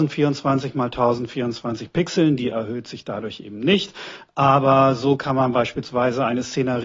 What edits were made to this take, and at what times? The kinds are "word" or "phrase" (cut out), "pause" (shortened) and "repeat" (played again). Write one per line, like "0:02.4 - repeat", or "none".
none